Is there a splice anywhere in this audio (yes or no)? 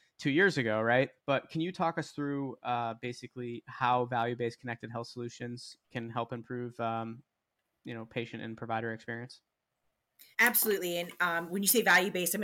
yes